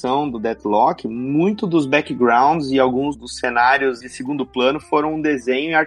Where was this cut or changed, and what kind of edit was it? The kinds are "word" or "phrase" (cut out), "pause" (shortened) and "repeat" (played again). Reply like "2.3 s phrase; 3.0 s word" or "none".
4.0 s phrase